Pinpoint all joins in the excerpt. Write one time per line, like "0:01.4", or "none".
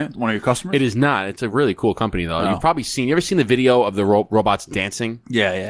none